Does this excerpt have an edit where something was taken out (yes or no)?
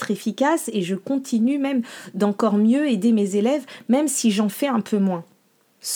no